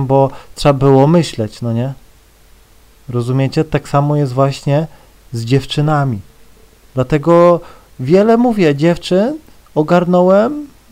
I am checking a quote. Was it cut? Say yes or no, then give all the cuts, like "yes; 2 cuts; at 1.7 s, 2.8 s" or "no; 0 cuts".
no; 0 cuts